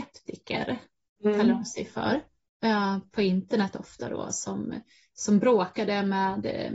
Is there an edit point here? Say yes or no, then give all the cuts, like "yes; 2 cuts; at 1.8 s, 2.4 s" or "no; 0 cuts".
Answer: no; 0 cuts